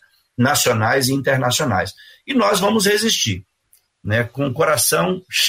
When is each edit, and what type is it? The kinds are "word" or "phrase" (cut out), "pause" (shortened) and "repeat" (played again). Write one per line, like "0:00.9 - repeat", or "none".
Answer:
none